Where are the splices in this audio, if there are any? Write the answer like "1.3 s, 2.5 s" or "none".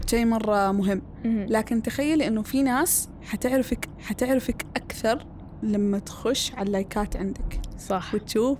4.0 s